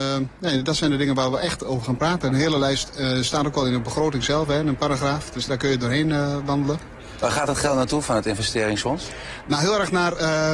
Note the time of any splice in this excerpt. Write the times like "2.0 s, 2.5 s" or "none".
5.5 s